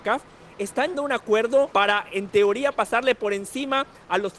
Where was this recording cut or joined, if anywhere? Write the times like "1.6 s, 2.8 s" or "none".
0.9 s, 1.7 s